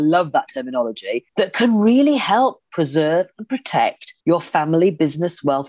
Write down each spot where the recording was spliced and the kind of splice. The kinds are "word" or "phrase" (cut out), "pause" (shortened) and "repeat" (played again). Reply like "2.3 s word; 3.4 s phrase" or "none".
1.3 s pause; 4.2 s pause